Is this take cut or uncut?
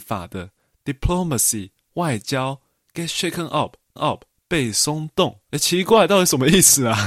cut